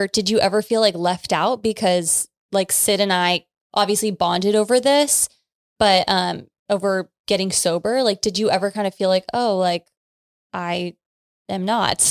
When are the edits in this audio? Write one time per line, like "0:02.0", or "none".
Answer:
none